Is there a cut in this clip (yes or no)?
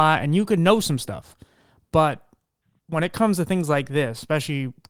no